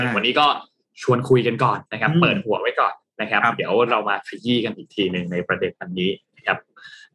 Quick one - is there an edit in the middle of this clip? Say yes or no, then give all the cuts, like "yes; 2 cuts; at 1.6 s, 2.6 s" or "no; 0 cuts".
yes; 1 cut; at 1.9 s